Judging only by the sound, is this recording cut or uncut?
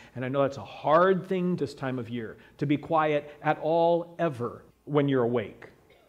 cut